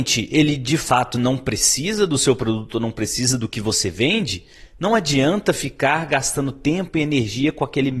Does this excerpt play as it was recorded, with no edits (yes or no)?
yes